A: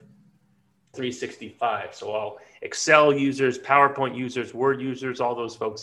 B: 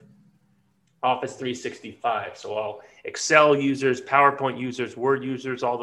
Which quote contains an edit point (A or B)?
A